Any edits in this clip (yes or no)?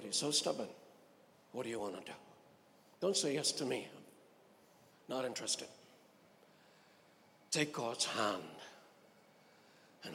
no